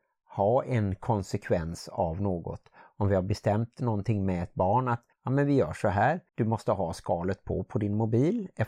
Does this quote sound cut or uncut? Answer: cut